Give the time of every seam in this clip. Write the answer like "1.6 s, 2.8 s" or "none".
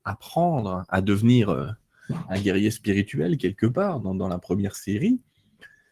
none